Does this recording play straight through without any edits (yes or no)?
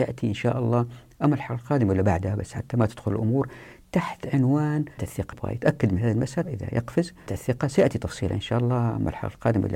no